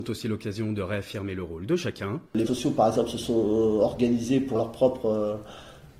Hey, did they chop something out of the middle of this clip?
yes; 2 cuts; at 2.5 s, 4.5 s

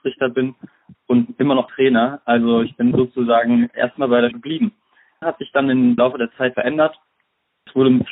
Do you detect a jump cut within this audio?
yes; 6 cuts; at 1.7 s, 2.9 s, 4.3 s, 5.2 s, 6.0 s, 6.5 s

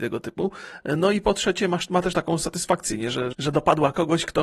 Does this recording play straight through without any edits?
no; 2 cuts; at 2.1 s, 3.3 s

